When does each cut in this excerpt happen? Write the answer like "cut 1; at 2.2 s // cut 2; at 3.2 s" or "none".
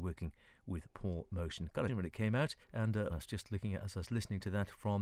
cut 1; at 1.9 s // cut 2; at 2.6 s // cut 3; at 3.1 s